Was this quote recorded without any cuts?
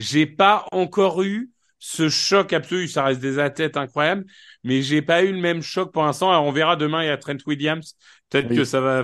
yes; 0 cuts

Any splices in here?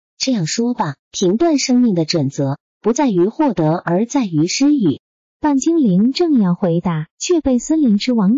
yes; 2 cuts; at 1.0 s, 7.1 s

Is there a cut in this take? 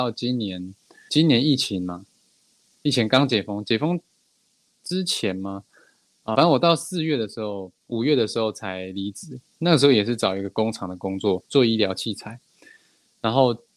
yes; 4 cuts; at 1.1 s, 6.3 s, 7.8 s, 11.4 s

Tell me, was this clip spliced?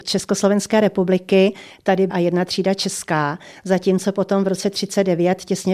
yes; 1 cut; at 2.1 s

